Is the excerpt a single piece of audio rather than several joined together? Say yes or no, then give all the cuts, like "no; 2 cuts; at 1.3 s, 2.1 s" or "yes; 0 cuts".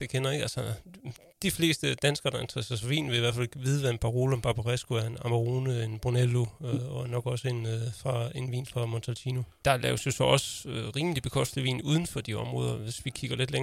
yes; 0 cuts